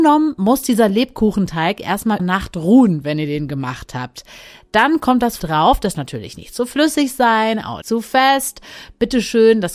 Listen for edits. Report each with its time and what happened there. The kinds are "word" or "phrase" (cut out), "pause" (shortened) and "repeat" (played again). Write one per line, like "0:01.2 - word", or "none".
0:02.2 - word
0:05.4 - word
0:05.9 - word
0:07.8 - word